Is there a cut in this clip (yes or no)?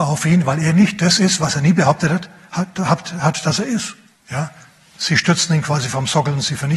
yes